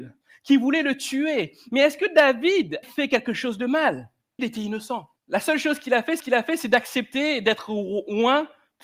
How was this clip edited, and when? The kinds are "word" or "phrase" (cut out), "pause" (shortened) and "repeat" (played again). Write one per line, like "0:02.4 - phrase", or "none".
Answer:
0:02.8 - word
0:04.4 - word
0:05.2 - pause
0:06.2 - repeat